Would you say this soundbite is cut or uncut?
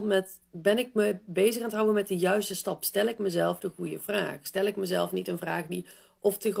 uncut